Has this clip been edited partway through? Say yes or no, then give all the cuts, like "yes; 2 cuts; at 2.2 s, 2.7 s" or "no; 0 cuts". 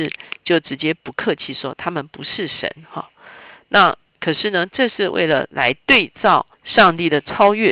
yes; 1 cut; at 6.5 s